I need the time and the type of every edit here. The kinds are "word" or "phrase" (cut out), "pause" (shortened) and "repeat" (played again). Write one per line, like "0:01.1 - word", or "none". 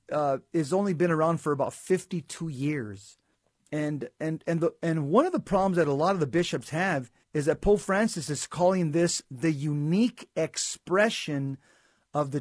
0:03.3 - pause
0:07.2 - pause